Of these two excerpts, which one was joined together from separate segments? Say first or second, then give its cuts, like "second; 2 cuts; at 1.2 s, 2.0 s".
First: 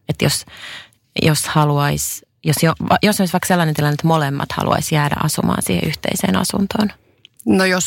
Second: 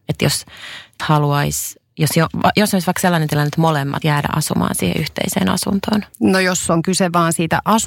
second; 3 cuts; at 1.0 s, 4.0 s, 6.1 s